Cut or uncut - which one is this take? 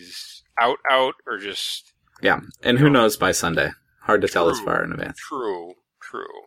uncut